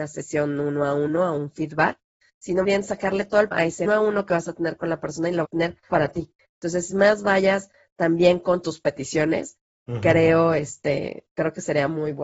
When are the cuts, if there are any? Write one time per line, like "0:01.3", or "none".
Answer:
0:02.6
0:03.5
0:03.8
0:05.4
0:05.9
0:06.9